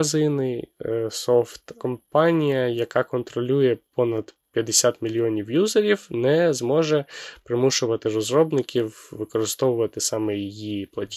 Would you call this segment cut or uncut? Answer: uncut